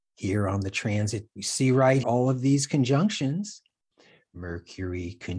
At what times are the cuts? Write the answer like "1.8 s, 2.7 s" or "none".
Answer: 1.3 s, 2.0 s